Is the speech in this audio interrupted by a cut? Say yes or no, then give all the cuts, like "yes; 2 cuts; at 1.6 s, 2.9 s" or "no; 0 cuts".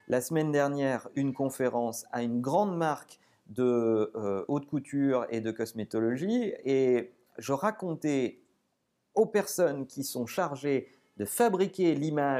no; 0 cuts